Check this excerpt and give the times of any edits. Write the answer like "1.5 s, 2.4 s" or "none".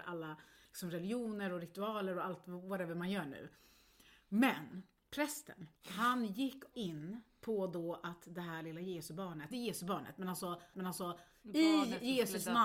5.8 s, 6.7 s, 9.5 s, 10.7 s